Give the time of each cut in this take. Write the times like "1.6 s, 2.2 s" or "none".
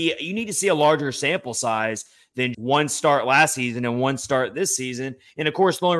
2.5 s